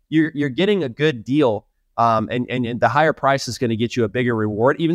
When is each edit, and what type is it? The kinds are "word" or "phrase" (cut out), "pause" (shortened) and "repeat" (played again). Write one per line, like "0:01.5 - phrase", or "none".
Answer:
none